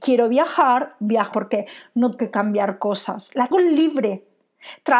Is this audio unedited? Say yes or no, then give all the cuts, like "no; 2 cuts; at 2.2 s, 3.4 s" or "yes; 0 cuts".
no; 3 cuts; at 1.3 s, 2.2 s, 3.5 s